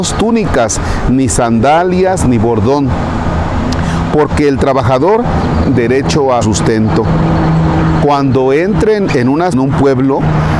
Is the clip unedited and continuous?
no; 3 cuts; at 5.6 s, 6.4 s, 9.5 s

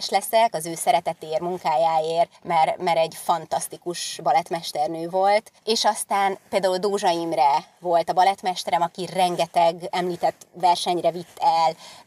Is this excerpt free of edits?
no; 1 cut; at 2.4 s

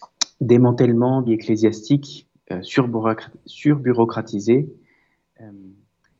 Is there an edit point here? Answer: yes; 1 cut; at 1.3 s

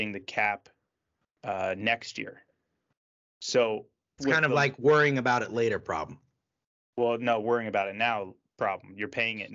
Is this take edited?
yes; 1 cut; at 4.2 s

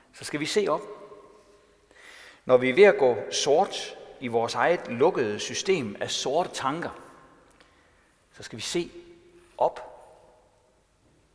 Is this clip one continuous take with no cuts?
yes; 0 cuts

